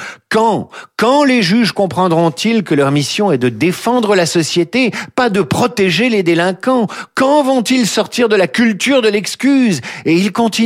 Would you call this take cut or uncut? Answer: uncut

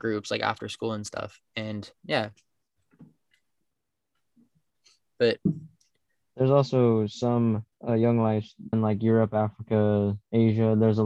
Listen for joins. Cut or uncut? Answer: cut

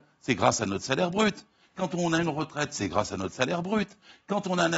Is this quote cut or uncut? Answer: uncut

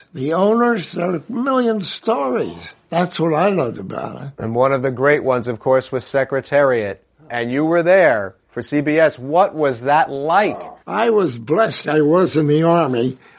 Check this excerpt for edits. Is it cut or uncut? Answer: cut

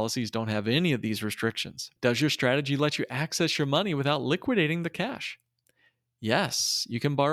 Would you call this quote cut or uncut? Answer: cut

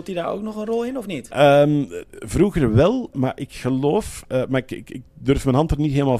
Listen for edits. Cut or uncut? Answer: cut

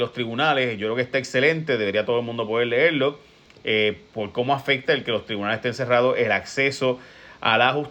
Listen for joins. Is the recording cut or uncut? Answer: uncut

